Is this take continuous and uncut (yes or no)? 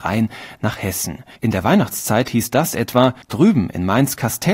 no